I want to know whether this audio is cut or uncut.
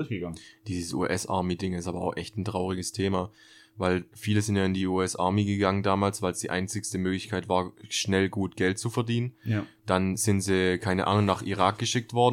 uncut